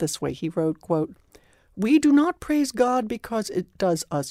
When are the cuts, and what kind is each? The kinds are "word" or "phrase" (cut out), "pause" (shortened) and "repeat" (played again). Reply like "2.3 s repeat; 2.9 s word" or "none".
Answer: none